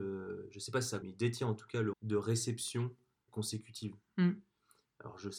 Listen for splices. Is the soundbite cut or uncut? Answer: cut